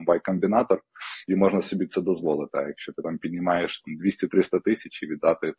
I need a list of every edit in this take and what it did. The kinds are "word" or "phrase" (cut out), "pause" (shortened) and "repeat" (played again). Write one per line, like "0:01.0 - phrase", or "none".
0:01.3 - phrase